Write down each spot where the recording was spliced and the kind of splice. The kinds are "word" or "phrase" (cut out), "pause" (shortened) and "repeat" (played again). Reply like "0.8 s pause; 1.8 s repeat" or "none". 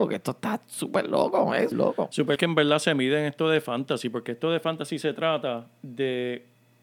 1.7 s word; 2.4 s phrase